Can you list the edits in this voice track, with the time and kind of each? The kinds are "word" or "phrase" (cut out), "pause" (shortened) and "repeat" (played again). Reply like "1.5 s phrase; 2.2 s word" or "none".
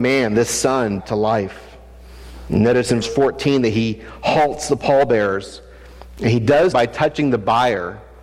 1.0 s word; 3.0 s word; 6.7 s word